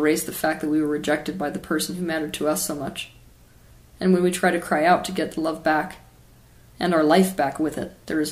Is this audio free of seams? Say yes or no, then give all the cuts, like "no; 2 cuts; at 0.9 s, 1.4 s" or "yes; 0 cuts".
yes; 0 cuts